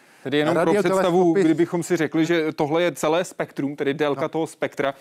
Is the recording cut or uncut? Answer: uncut